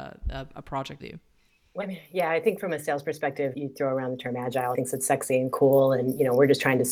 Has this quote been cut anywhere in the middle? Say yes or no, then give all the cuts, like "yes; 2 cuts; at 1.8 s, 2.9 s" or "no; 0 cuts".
yes; 4 cuts; at 1.0 s, 1.8 s, 3.5 s, 4.7 s